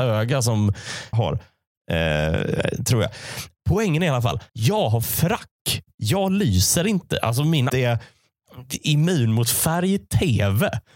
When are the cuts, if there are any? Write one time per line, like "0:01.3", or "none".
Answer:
0:01.1
0:04.5
0:05.0
0:05.9
0:07.7